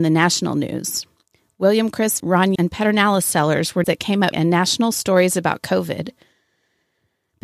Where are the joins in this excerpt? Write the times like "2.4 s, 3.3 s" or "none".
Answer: 2.2 s, 2.6 s, 3.8 s, 4.3 s